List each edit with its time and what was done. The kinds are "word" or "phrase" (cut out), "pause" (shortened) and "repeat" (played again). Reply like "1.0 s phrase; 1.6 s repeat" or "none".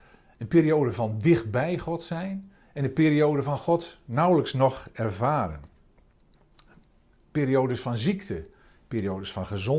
none